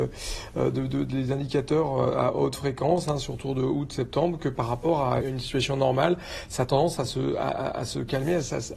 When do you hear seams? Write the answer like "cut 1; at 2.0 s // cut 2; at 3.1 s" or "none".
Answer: cut 1; at 5.2 s